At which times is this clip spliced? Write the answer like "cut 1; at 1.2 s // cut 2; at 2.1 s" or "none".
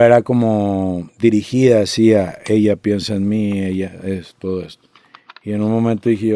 none